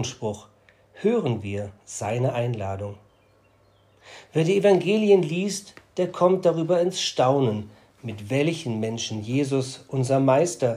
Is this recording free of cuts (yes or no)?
yes